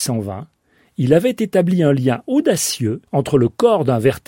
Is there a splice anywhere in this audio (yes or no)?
yes